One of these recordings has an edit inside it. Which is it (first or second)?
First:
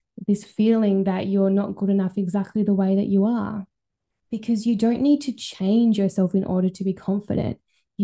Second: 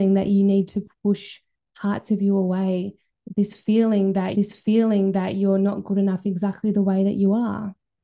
second